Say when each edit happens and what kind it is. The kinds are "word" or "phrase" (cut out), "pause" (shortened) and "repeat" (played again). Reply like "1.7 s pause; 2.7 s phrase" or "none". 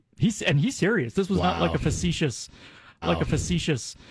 3.0 s repeat